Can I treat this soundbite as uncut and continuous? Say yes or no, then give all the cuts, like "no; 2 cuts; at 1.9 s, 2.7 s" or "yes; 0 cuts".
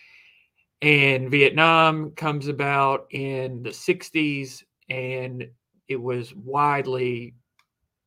yes; 0 cuts